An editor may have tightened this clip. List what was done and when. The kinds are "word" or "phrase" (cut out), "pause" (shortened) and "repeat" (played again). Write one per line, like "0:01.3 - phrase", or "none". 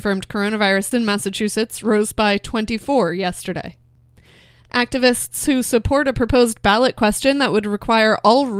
0:00.9 - word